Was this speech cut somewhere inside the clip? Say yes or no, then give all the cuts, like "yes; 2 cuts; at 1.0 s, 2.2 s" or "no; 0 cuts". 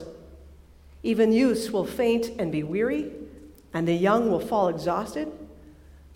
no; 0 cuts